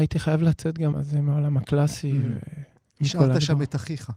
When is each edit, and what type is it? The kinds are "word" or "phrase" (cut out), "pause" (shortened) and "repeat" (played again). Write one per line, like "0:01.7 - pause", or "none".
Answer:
0:00.9 - word